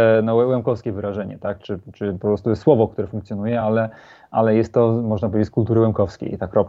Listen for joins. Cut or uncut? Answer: uncut